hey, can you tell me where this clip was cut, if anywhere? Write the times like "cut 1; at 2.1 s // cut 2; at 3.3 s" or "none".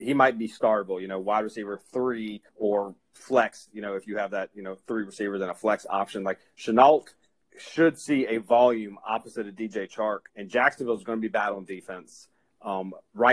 cut 1; at 2.5 s // cut 2; at 7.4 s // cut 3; at 10.3 s